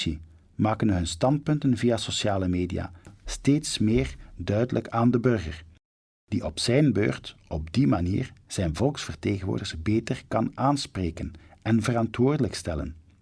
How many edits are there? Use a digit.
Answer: 0